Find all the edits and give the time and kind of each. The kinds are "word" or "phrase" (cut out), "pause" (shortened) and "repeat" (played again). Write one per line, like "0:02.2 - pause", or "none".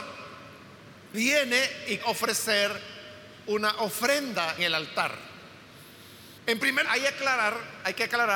0:01.1 - word
0:02.0 - word
0:04.6 - word
0:06.4 - pause
0:06.9 - word

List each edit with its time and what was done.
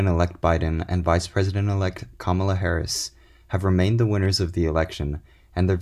none

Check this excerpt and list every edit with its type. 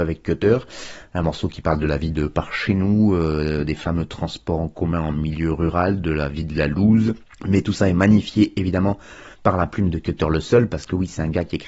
0:07.2 - pause
0:09.3 - pause

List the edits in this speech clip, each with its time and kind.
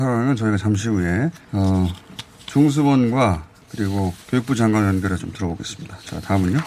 0:01.4 - pause
0:04.2 - pause
0:05.2 - word

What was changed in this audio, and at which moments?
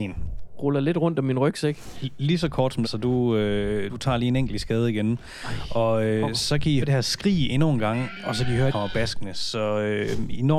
0:02.8 - phrase
0:03.9 - word
0:06.8 - word
0:08.7 - phrase

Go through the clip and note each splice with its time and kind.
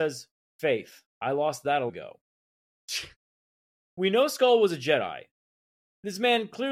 0:01.1 - pause
0:01.9 - phrase

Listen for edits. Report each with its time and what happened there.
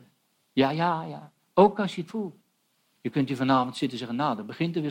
0:02.1 - word
0:02.7 - pause

